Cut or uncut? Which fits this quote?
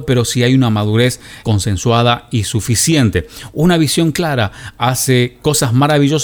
cut